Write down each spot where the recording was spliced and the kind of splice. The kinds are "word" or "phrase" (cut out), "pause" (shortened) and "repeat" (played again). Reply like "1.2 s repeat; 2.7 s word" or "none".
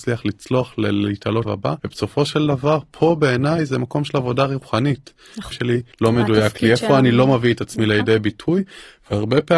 1.5 s word; 1.8 s pause; 5.5 s phrase; 5.9 s pause